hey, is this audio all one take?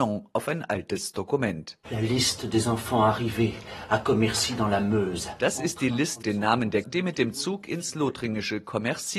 no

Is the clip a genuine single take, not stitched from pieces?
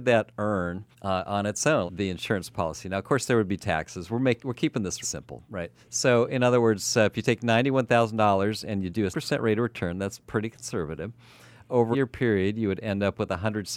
no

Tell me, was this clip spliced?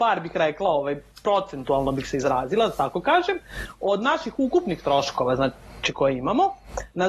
no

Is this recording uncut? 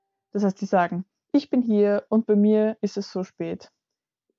yes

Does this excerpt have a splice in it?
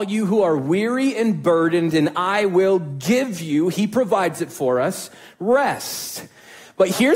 no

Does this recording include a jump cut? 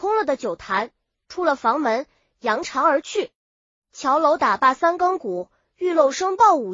no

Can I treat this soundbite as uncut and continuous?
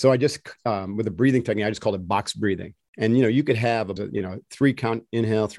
no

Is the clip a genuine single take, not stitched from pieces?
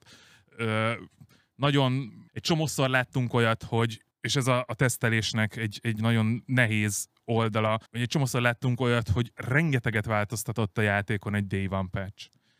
no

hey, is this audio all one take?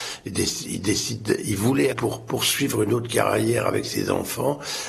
no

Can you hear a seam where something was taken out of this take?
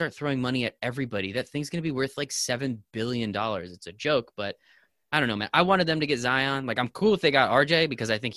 no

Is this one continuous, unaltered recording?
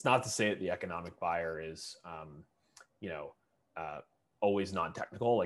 yes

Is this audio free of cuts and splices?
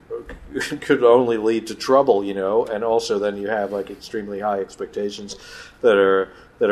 yes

